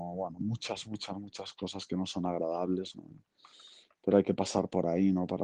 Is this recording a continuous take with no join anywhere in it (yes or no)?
yes